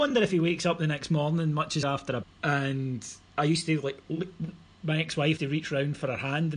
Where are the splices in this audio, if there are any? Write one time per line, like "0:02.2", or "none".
0:01.8
0:02.2
0:05.4